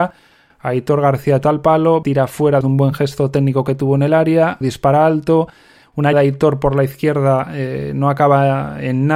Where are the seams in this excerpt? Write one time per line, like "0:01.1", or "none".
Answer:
0:01.4
0:02.0
0:02.6
0:04.6
0:06.1